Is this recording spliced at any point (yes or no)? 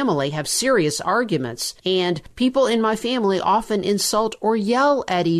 no